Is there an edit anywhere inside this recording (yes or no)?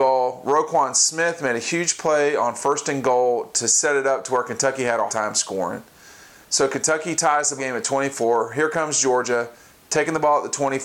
yes